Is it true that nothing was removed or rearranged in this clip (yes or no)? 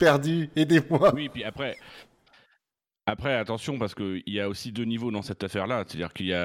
yes